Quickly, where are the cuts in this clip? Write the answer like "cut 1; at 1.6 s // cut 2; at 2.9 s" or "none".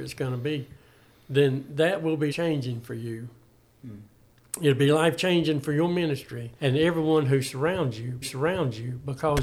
cut 1; at 2.3 s // cut 2; at 6.5 s // cut 3; at 8.2 s